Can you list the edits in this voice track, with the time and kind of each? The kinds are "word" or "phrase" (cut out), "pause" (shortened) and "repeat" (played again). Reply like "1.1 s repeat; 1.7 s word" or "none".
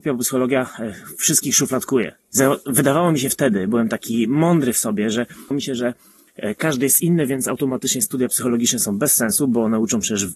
2.2 s pause; 5.5 s word